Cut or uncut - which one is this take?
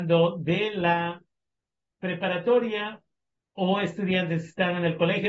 uncut